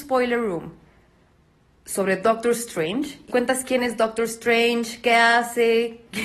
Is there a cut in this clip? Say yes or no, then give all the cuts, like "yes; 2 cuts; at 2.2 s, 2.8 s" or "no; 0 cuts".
yes; 1 cut; at 3.3 s